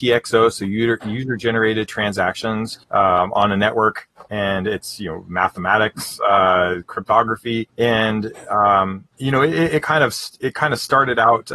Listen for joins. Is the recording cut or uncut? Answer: cut